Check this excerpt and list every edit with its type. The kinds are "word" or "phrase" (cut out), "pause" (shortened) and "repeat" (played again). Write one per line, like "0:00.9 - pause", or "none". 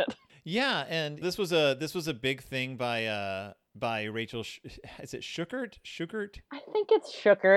0:01.2 - word